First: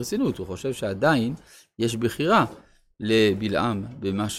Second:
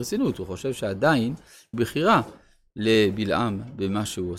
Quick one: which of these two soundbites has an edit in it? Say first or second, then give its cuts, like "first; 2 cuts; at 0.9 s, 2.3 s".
second; 1 cut; at 1.7 s